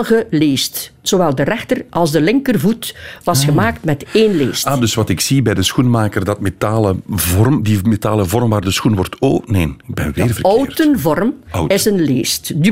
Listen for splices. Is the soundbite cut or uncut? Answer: uncut